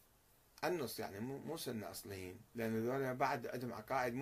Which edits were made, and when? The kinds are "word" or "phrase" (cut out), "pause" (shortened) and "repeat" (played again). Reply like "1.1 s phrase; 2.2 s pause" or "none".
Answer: 2.5 s pause